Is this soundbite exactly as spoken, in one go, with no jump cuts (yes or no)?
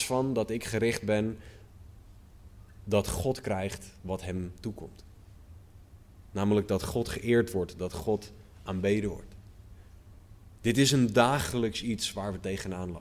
yes